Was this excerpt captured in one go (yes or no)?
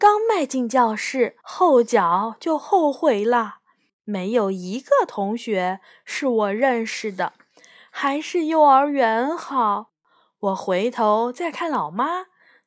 no